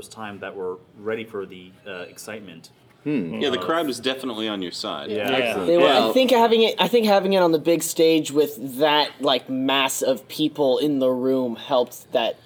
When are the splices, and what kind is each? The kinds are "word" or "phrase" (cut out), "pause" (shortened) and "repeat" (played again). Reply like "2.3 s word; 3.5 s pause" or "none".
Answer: none

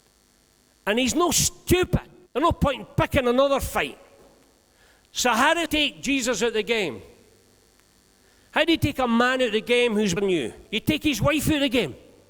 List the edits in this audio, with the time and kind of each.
2.3 s pause; 5.7 s word; 10.2 s word; 10.7 s pause

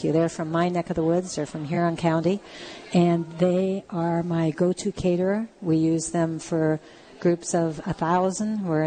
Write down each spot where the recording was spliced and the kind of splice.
none

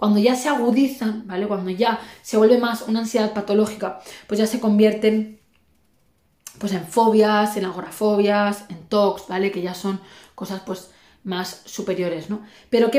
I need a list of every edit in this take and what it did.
none

